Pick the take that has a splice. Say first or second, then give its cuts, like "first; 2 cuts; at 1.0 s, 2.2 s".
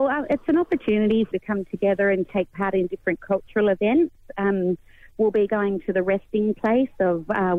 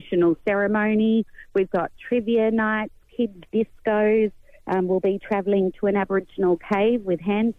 first; 1 cut; at 1.3 s